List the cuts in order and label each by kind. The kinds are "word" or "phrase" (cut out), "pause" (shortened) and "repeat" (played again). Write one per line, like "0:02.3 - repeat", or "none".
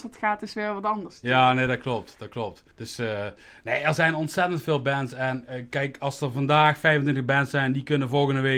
0:02.7 - pause

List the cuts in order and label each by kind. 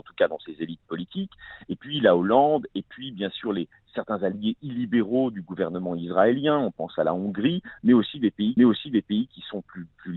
0:08.6 - repeat

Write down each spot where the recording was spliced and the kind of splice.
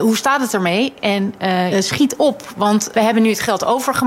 0:01.7 - word
0:02.9 - word

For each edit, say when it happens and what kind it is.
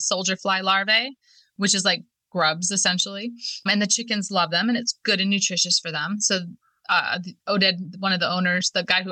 none

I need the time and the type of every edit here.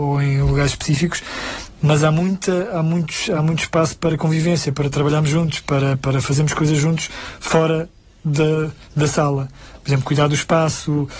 none

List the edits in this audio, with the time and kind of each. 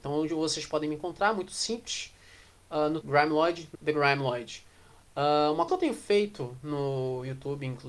0:03.0 - word
0:03.7 - word
0:05.7 - word

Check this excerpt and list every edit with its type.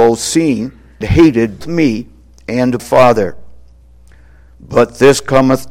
0:01.0 - word
0:01.6 - word
0:02.8 - word

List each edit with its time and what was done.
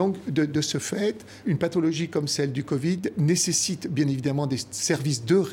0:01.4 - word

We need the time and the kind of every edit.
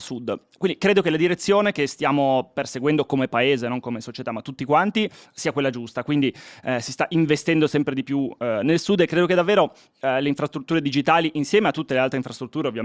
none

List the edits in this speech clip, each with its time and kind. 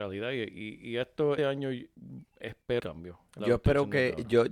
0:01.4 - word
0:02.8 - word
0:03.4 - word

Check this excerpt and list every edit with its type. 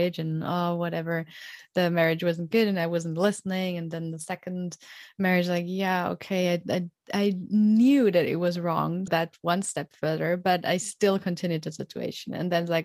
0:09.1 - word

